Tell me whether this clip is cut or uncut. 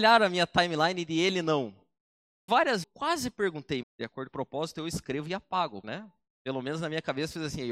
cut